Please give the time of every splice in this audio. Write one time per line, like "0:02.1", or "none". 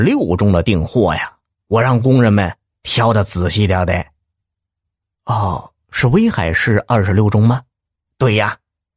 none